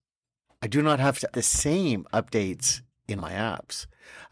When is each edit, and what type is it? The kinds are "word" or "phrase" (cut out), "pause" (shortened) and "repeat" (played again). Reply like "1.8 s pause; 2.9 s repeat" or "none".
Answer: 1.3 s word; 3.2 s word